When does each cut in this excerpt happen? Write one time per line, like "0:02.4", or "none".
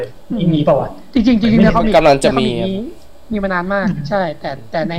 none